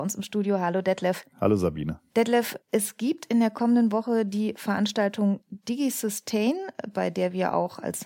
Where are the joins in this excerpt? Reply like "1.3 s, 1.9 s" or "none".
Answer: 2.6 s